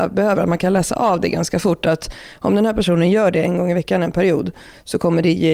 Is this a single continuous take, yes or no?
yes